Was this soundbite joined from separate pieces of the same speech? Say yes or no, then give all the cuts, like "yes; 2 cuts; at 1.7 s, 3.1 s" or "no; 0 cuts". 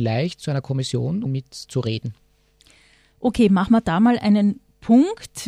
yes; 1 cut; at 1.3 s